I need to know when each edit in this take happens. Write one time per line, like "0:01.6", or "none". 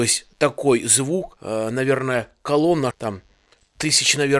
0:02.9